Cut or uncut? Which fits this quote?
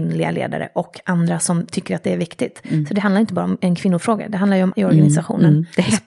cut